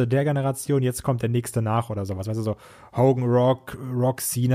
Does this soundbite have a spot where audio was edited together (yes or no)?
no